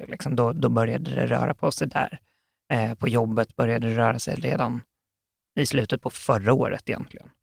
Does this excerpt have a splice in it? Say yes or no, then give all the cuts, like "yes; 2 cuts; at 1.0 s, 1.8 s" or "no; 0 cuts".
no; 0 cuts